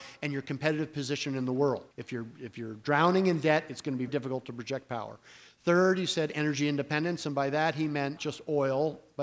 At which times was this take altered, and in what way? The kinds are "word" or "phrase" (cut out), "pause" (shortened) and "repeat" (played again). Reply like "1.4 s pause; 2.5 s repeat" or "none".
1.9 s pause; 4.1 s word; 8.2 s word